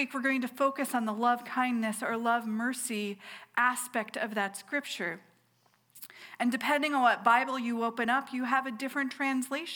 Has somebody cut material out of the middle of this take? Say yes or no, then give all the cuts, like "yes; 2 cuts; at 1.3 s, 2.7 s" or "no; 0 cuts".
no; 0 cuts